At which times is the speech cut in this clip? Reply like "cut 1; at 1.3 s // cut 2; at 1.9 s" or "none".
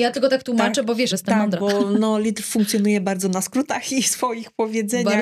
cut 1; at 1.1 s